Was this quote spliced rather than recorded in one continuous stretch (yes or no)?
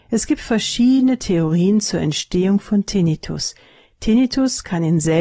no